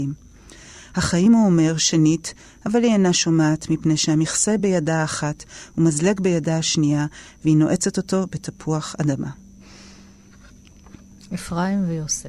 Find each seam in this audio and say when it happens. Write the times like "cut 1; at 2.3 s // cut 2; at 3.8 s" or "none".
none

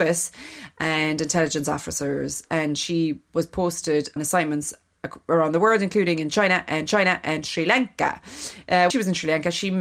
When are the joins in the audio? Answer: cut 1; at 4.2 s // cut 2; at 6.9 s // cut 3; at 8.9 s

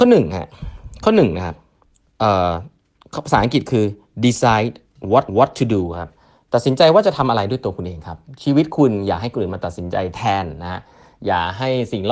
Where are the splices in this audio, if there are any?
cut 1; at 5.3 s

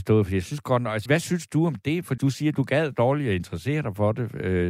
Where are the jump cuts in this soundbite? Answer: cut 1; at 1.1 s // cut 2; at 2.2 s

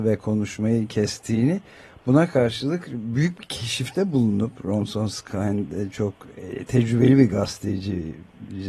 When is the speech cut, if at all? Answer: none

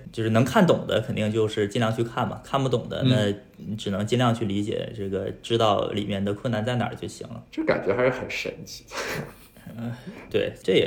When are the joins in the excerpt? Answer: cut 1; at 7.5 s

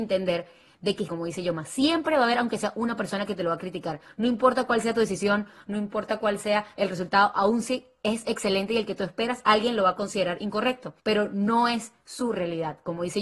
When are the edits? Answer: cut 1; at 1.1 s // cut 2; at 11.0 s

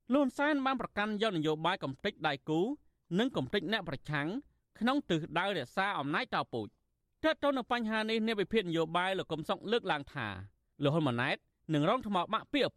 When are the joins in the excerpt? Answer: none

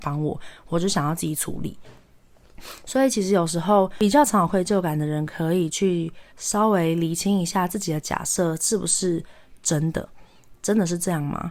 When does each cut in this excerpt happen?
cut 1; at 6.3 s

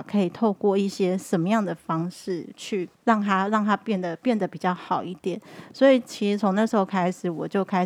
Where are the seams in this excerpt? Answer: cut 1; at 2.9 s

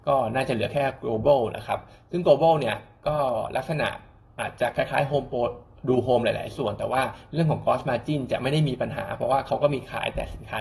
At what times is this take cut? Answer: none

